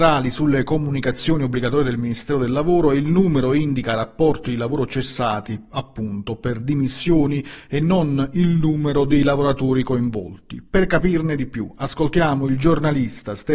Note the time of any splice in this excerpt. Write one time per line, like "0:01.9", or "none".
none